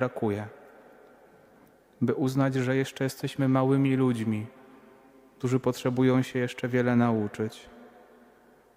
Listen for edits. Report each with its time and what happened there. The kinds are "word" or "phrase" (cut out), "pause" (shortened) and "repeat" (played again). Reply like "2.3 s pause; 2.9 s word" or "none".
none

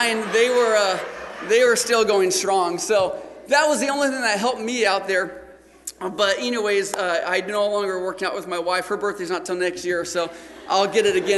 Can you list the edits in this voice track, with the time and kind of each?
none

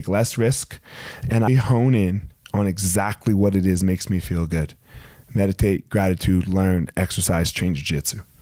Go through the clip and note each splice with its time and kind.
1.5 s word

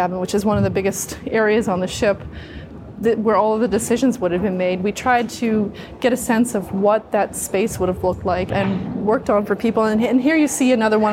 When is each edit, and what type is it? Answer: 8.5 s word

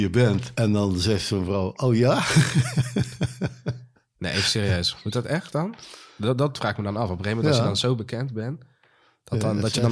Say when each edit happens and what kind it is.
none

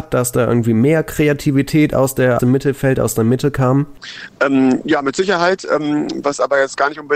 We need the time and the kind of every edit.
2.4 s word

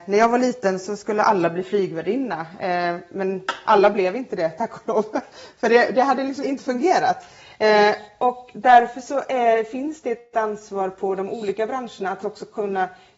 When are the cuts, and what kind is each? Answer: 6.4 s word

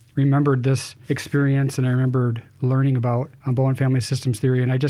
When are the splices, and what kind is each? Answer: 1.0 s pause; 3.4 s pause

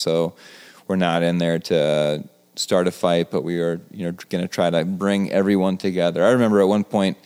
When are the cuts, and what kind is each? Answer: none

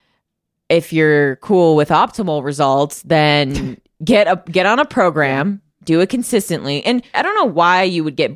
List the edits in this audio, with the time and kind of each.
7.1 s word

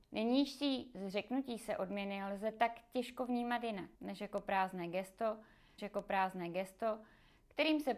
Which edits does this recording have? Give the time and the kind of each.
4.0 s pause; 5.8 s repeat

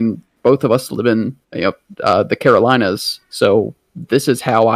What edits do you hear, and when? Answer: 1.4 s pause; 3.2 s pause

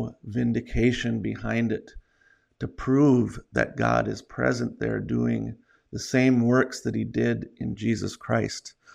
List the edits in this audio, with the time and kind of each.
none

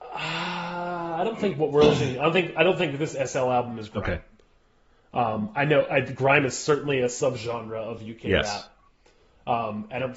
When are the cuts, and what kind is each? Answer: none

